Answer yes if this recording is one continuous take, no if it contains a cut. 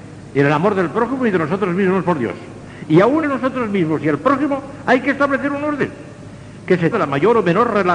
no